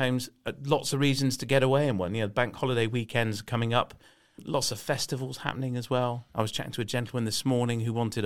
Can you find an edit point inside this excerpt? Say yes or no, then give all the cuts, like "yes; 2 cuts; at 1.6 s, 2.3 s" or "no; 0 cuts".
no; 0 cuts